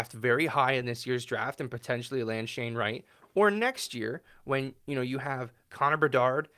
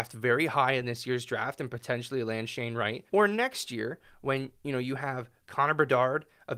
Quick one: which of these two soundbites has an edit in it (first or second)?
second